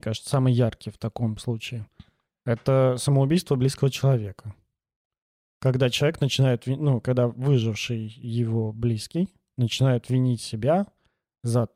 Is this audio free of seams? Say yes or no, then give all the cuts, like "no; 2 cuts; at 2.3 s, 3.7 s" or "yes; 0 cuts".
yes; 0 cuts